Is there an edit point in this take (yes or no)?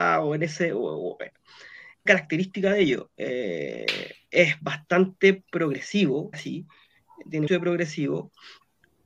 yes